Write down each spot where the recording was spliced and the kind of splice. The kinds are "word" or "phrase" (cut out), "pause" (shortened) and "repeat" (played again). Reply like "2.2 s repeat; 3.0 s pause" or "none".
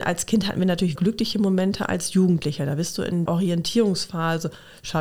1.0 s phrase; 3.3 s word